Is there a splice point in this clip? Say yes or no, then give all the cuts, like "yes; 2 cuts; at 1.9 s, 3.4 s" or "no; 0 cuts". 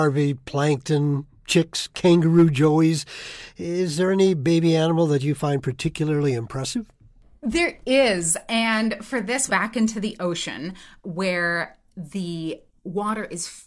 yes; 1 cut; at 9.5 s